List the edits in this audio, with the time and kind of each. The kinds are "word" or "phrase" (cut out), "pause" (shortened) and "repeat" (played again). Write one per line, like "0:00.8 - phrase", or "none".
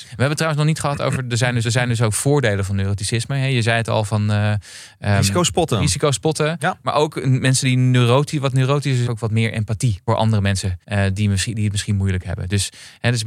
0:01.6 - repeat
0:09.1 - phrase
0:10.1 - word
0:10.8 - pause